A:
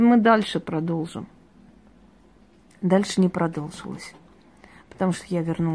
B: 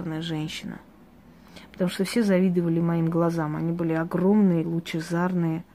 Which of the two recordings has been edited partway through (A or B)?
B